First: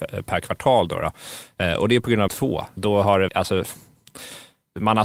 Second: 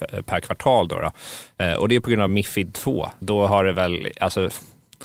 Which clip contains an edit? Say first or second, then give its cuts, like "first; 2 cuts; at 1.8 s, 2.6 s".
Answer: first; 2 cuts; at 2.3 s, 3.3 s